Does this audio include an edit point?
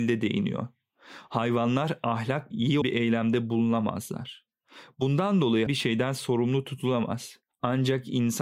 yes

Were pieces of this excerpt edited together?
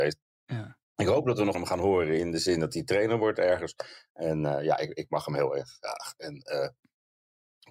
yes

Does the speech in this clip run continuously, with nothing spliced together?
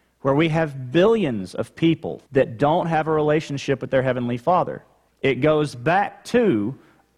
no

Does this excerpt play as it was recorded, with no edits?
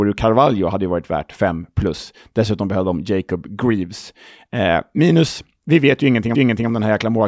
no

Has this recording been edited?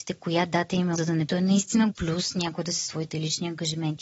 yes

